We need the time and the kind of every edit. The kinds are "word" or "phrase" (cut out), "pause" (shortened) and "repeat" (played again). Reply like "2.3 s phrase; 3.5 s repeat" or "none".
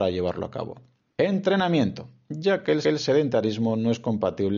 2.8 s repeat